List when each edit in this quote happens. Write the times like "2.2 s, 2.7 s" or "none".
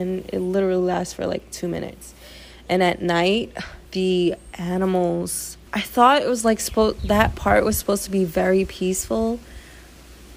3.9 s, 5.7 s